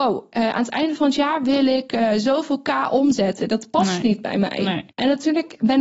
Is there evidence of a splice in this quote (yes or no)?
yes